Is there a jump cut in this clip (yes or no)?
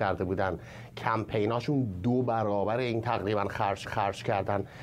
yes